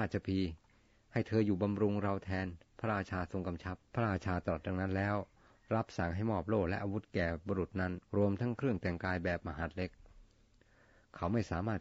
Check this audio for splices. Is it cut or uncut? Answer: cut